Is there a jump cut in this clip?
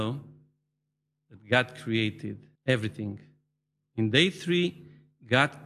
yes; 1 cut; at 2.6 s

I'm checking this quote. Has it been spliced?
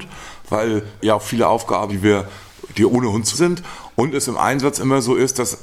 yes; 3 cuts; at 1.0 s, 1.9 s, 3.3 s

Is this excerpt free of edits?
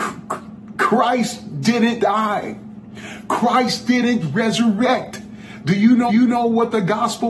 no; 3 cuts; at 2.0 s, 4.2 s, 6.1 s

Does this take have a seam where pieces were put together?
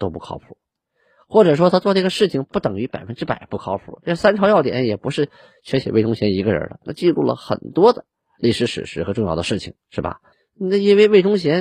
yes; 1 cut; at 10.3 s

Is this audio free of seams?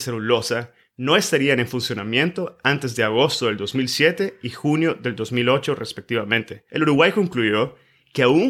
no; 1 cut; at 6.7 s

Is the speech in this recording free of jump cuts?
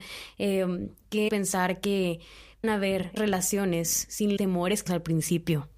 no; 5 cuts; at 1.3 s, 2.6 s, 3.2 s, 4.4 s, 4.9 s

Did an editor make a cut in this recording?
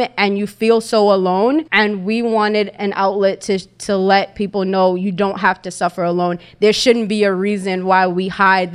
yes; 1 cut; at 1.7 s

